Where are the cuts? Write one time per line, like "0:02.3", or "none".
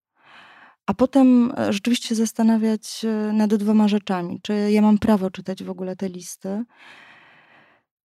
0:02.0